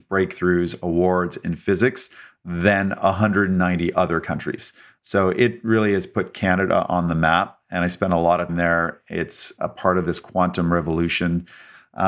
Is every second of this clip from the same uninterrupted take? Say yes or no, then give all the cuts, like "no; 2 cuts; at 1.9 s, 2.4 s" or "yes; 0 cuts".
no; 1 cut; at 8.5 s